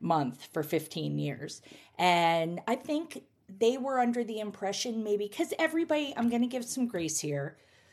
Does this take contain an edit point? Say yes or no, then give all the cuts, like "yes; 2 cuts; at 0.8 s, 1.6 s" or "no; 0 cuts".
no; 0 cuts